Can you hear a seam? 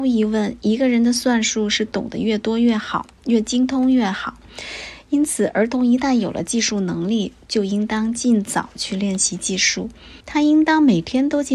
yes; 1 cut; at 10.2 s

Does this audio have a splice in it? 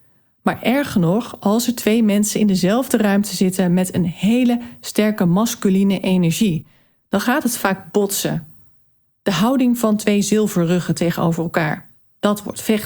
no; 0 cuts

